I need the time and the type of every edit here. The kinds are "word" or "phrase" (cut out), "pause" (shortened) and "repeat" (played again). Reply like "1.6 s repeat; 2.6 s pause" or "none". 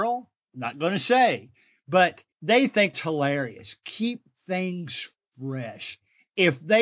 2.3 s pause; 2.9 s word